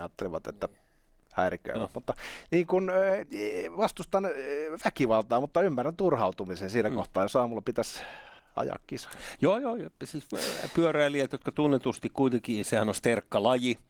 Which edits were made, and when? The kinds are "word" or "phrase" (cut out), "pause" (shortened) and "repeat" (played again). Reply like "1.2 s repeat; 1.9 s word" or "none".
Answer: 8.4 s pause

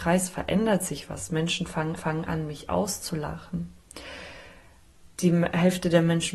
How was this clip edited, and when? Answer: 2.0 s repeat

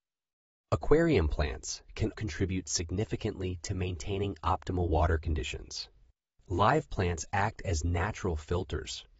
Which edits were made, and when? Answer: 2.1 s word

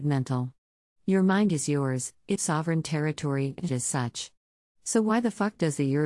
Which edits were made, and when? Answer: 2.4 s phrase; 3.7 s phrase

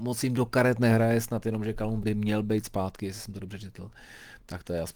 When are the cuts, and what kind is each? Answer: 2.0 s word

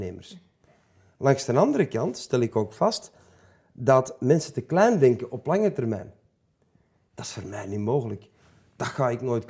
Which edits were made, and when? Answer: none

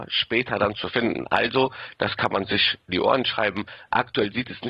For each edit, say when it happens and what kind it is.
2.9 s word

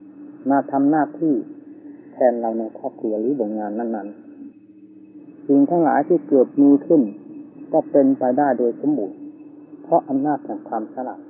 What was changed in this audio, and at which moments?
4.5 s pause

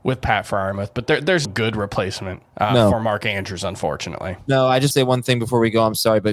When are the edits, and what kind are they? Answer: 1.4 s word; 2.5 s pause; 4.9 s phrase

